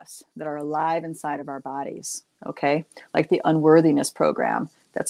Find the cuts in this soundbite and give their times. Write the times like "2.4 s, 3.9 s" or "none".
none